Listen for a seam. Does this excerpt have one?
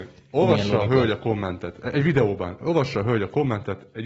no; 0 cuts

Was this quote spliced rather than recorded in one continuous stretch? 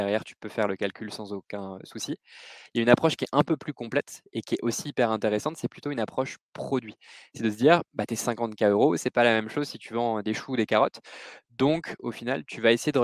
no; 0 cuts

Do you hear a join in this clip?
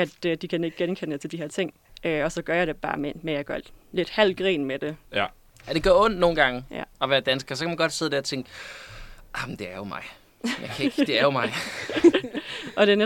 yes; 3 cuts; at 1.9 s, 5.0 s, 6.9 s

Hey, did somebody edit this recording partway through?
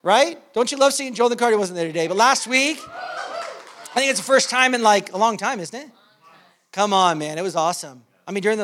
no; 0 cuts

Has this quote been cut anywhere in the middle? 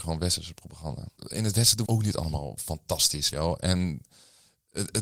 yes; 3 cuts; at 1.2 s, 1.9 s, 3.3 s

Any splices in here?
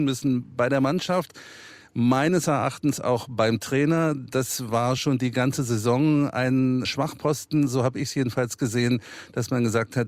no; 0 cuts

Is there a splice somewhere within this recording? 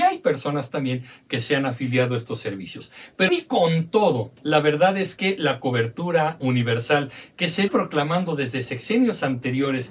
yes; 4 cuts; at 3.3 s, 4.4 s, 6.4 s, 7.7 s

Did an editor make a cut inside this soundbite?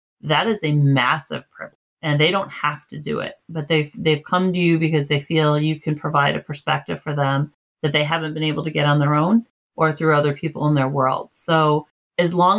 no; 0 cuts

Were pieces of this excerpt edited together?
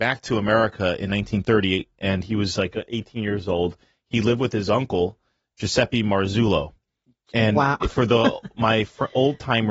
no; 0 cuts

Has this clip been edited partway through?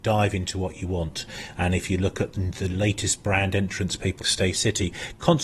yes; 1 cut; at 4.2 s

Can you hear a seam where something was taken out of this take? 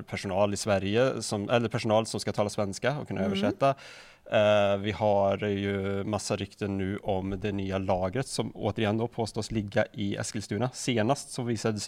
no; 0 cuts

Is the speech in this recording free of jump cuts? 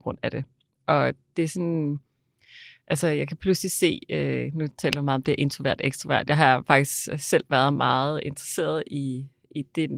yes; 0 cuts

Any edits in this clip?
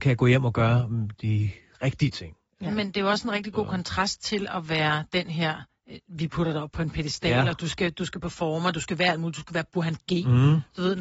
no; 0 cuts

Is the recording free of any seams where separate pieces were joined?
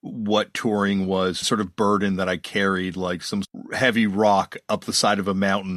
no; 2 cuts; at 1.4 s, 3.4 s

